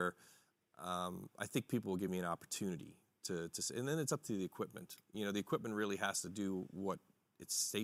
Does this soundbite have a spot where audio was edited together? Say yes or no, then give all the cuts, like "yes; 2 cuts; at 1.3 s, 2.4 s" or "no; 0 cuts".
no; 0 cuts